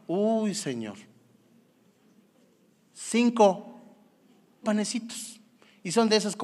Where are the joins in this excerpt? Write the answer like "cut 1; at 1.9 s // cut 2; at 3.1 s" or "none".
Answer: cut 1; at 4.6 s